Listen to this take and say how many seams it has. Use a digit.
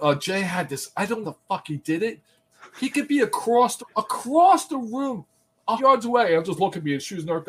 3